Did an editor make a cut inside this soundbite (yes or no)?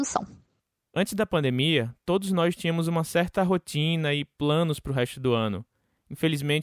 no